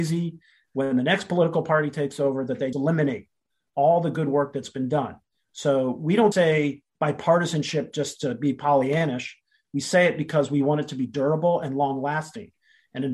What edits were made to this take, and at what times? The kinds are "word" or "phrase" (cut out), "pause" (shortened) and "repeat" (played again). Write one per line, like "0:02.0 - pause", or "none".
0:02.7 - word
0:06.3 - word